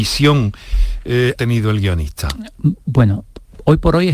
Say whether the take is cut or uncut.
cut